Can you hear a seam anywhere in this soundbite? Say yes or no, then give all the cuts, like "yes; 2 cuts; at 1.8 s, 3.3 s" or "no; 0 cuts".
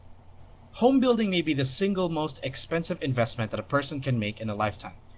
no; 0 cuts